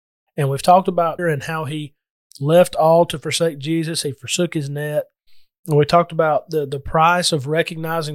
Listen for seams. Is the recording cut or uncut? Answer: cut